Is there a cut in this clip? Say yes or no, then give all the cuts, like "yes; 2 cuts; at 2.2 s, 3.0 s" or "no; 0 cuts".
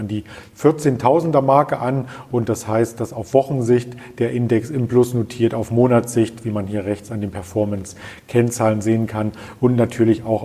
no; 0 cuts